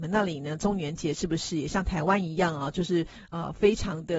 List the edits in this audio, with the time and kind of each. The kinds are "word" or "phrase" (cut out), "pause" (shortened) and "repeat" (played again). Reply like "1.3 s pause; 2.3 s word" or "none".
none